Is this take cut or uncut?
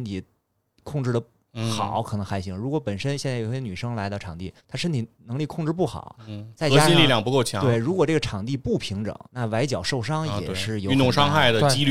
cut